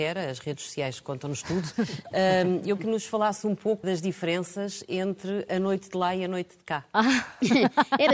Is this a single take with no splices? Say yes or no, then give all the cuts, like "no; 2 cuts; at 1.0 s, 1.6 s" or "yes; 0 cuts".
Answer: no; 2 cuts; at 2.8 s, 3.8 s